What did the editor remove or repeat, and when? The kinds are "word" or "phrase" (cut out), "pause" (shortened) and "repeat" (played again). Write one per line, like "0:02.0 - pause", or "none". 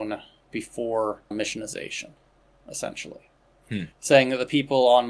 0:01.3 - word
0:03.9 - pause

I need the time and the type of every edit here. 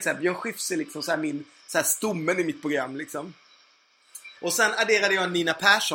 0:04.4 - pause

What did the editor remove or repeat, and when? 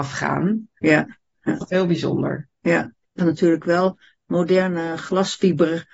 0:01.6 - word
0:03.2 - word

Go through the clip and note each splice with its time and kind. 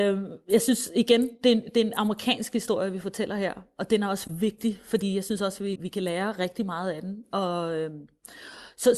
0:05.8 - word

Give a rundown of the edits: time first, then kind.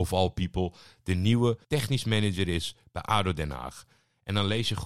0:01.6 - pause

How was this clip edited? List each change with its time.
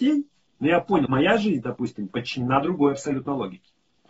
0:01.1 - word

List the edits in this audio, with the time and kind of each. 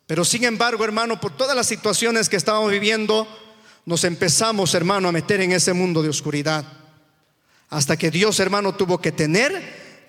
none

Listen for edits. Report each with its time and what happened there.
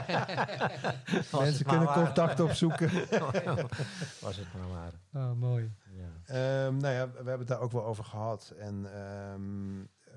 0:05.8 - pause

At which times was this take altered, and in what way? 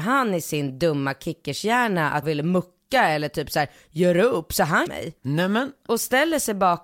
0:02.2 - word
0:04.9 - phrase
0:05.2 - pause

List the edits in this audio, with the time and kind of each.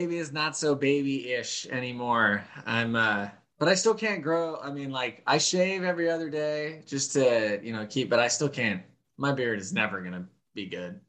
none

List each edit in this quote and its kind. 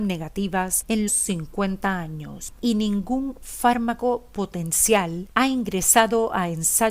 0:01.1 - phrase

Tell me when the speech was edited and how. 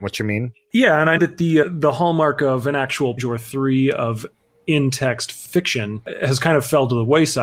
0:01.2 - word
0:01.6 - word
0:03.2 - word

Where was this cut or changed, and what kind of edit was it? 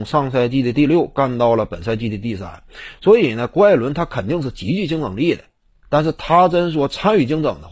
none

